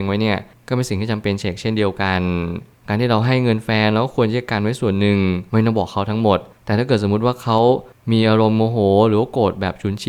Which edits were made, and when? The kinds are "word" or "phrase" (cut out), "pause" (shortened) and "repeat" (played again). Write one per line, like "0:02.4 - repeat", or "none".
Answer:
0:05.5 - pause